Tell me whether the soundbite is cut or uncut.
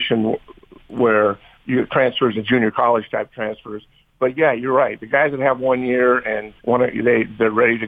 cut